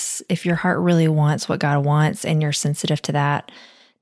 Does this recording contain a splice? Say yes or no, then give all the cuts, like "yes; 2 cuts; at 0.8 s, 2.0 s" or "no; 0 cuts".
no; 0 cuts